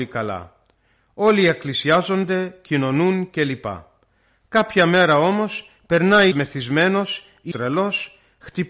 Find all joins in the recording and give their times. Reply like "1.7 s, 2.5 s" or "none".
6.3 s, 7.5 s